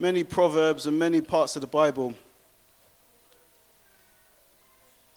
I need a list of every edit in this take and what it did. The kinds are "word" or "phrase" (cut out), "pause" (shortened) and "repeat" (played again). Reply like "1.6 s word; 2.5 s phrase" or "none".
none